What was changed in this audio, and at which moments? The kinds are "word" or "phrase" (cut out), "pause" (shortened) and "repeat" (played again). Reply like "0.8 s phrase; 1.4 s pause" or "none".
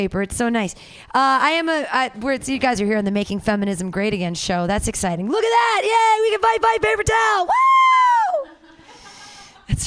6.6 s repeat